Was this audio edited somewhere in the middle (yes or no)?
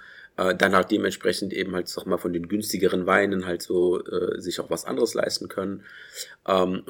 no